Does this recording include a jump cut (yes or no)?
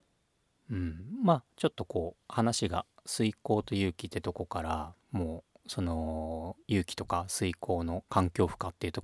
yes